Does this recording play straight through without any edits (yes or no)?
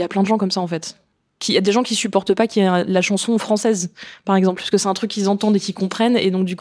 yes